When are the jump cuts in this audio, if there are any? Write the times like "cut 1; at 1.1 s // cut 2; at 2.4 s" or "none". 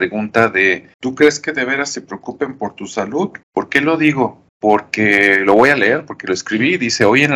cut 1; at 0.9 s // cut 2; at 3.4 s // cut 3; at 4.5 s